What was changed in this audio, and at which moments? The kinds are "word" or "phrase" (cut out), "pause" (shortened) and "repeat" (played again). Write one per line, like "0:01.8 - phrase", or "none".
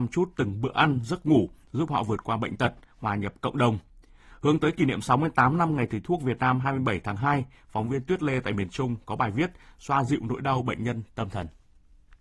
none